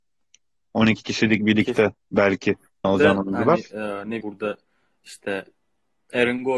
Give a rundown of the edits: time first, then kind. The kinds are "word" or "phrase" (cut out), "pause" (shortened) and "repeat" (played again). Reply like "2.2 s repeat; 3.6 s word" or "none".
2.8 s word; 4.2 s word